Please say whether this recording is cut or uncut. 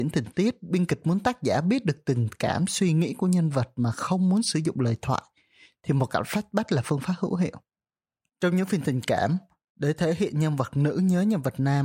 uncut